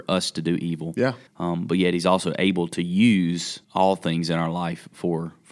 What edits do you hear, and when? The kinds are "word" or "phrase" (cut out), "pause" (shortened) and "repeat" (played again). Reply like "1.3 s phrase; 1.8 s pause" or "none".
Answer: 1.3 s pause; 3.6 s pause